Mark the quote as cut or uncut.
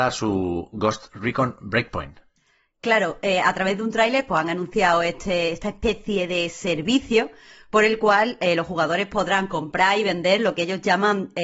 uncut